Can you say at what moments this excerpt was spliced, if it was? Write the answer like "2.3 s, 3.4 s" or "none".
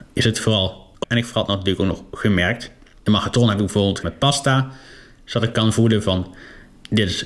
1.0 s, 4.0 s, 5.5 s

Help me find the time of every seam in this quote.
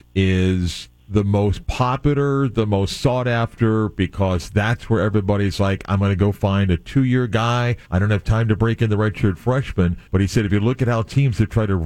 1.0 s, 7.8 s, 10.1 s

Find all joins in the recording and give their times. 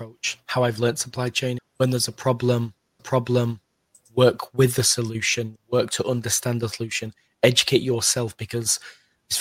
1.6 s, 3.0 s, 5.6 s

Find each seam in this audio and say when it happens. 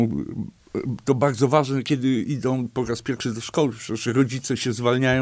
none

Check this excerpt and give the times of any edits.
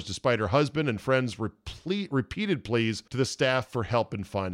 3.1 s

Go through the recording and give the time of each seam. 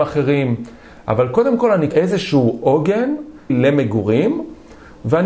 1.9 s, 3.5 s

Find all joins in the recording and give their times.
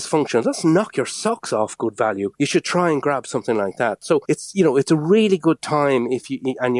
2.3 s, 4.2 s

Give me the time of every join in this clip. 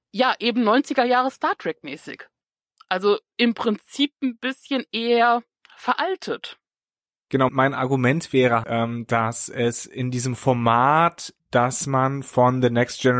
7.5 s, 8.6 s, 11.4 s

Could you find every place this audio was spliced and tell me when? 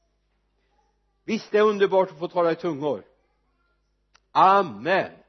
none

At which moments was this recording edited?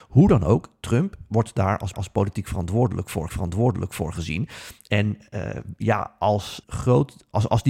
1.9 s, 3.3 s, 6.6 s

